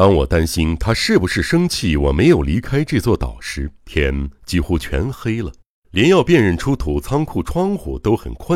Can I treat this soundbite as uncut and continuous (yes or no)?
no